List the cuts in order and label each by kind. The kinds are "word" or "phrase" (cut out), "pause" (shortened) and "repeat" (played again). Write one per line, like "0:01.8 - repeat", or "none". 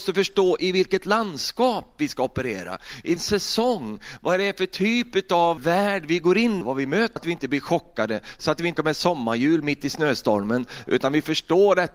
0:03.2 - word
0:05.6 - word
0:06.6 - word
0:07.2 - phrase
0:08.8 - word